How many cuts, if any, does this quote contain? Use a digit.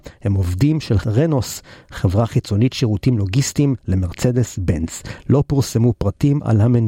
2